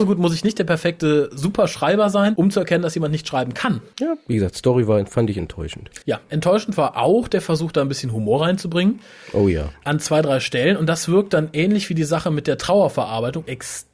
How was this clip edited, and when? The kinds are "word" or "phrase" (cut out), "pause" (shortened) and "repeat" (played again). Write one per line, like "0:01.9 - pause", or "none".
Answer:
0:06.0 - pause